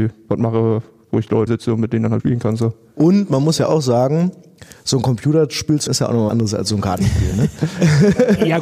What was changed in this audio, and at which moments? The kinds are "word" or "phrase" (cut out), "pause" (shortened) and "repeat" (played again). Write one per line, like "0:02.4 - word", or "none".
0:01.5 - word
0:02.2 - word
0:05.9 - word
0:06.3 - word